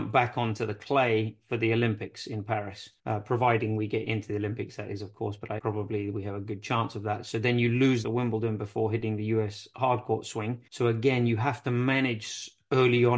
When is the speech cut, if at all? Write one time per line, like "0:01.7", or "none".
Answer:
0:03.0
0:05.6
0:08.0
0:10.7